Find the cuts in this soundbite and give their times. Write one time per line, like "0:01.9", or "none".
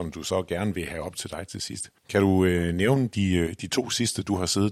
0:02.0